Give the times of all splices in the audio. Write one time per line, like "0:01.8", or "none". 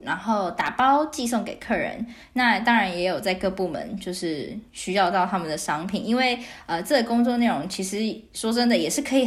0:04.7